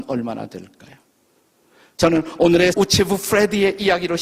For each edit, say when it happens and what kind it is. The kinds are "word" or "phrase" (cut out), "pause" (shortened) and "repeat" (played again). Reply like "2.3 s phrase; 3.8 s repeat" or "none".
2.7 s word